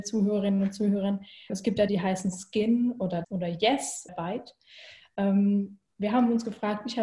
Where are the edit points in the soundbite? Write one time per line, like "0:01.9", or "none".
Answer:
0:01.5
0:01.9
0:03.2
0:04.1